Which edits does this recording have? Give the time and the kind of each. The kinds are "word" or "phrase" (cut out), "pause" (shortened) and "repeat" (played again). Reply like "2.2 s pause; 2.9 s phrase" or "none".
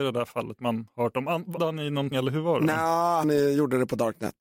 1.6 s word; 2.1 s word; 3.2 s word